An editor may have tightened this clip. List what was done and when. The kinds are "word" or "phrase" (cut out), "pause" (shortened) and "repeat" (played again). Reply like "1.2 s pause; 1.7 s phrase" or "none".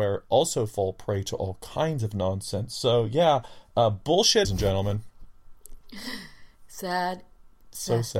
4.4 s phrase